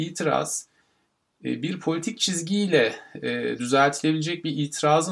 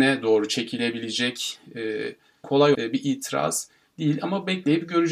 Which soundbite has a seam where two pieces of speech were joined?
second; 2 cuts; at 2.4 s, 2.7 s

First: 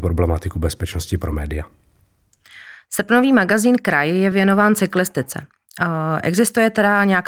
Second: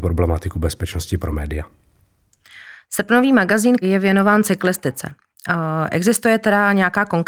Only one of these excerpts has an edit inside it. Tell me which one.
second; 1 cut; at 3.8 s

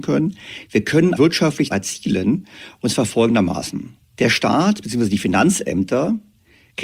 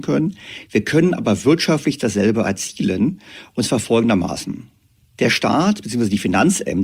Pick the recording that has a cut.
first; 3 cuts; at 1.2 s, 1.7 s, 4.0 s

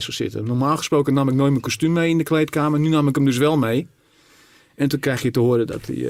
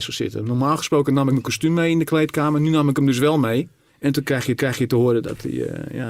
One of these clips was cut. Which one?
second; 3 cuts; at 1.3 s, 3.9 s, 4.6 s

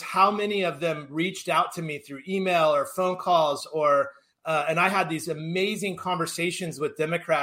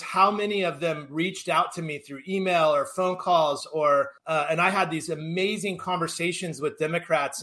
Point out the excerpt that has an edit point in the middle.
second; 1 cut; at 4.2 s

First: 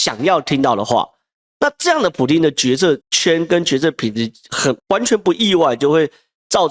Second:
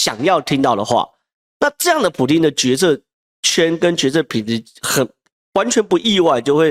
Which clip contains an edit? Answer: first; 2 cuts; at 3.0 s, 4.8 s

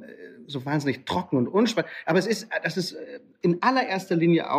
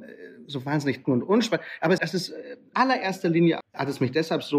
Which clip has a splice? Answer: second; 4 cuts; at 1.0 s, 2.0 s, 2.7 s, 3.6 s

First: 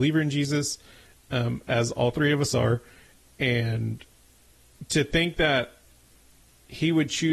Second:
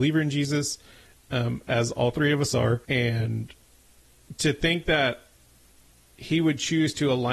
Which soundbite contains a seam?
second; 1 cut; at 2.8 s

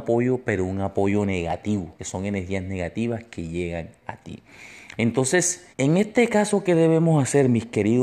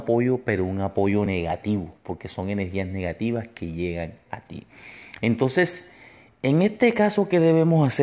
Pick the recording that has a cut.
first; 2 cuts; at 2.0 s, 5.7 s

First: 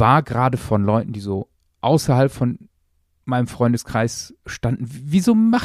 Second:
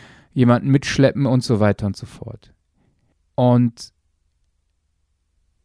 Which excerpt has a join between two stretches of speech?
second; 1 cut; at 3.1 s

